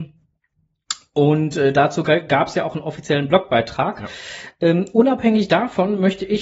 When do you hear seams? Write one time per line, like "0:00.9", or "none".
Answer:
none